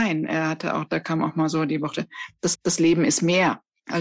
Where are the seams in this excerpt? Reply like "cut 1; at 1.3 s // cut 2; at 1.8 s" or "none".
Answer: cut 1; at 2.5 s